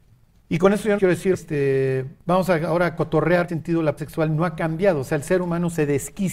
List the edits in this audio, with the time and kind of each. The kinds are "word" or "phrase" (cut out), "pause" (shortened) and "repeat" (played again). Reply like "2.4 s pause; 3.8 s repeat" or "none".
1.0 s phrase; 1.3 s word; 2.2 s pause; 3.5 s phrase; 4.0 s word